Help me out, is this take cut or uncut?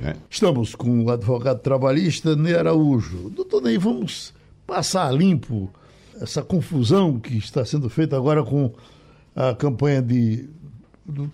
cut